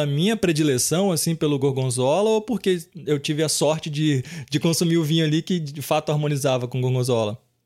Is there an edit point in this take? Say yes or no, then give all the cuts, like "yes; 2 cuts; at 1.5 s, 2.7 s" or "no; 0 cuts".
no; 0 cuts